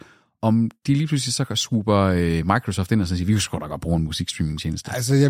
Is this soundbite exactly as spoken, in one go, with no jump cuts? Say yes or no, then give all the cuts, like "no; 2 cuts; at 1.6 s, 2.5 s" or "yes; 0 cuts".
yes; 0 cuts